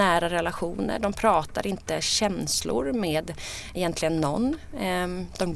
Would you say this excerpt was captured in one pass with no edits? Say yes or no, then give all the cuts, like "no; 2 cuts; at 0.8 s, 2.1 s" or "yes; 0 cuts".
no; 1 cut; at 3.8 s